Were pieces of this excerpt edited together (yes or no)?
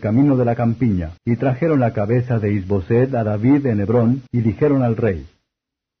yes